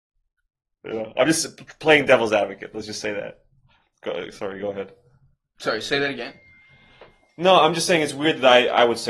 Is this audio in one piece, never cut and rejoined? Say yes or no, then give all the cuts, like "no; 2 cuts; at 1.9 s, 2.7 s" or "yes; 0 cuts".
yes; 0 cuts